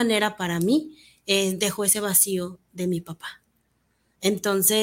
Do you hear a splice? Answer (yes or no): no